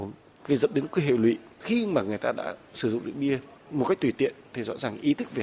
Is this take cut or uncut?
uncut